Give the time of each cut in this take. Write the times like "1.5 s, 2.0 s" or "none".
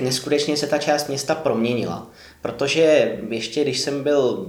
none